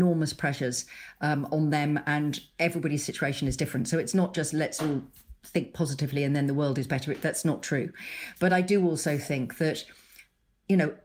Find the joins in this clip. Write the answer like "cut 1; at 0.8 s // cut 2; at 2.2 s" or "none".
none